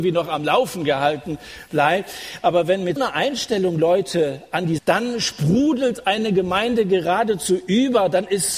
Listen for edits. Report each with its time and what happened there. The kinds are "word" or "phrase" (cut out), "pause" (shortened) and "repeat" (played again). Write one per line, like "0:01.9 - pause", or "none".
0:03.0 - word
0:04.8 - phrase